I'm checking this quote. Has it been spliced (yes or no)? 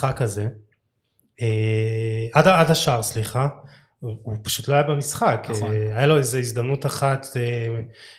no